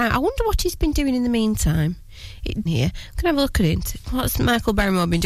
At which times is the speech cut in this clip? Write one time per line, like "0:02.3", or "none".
0:02.7